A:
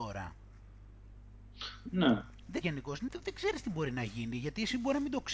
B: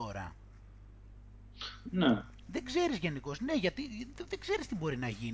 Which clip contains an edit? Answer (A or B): A